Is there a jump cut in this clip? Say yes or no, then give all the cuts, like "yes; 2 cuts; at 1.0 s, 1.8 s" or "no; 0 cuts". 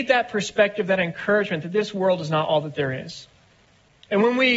no; 0 cuts